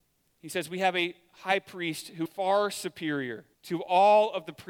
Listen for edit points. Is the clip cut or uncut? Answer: cut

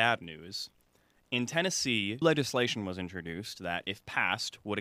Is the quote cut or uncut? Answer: cut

